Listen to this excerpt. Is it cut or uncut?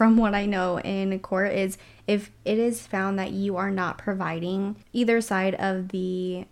uncut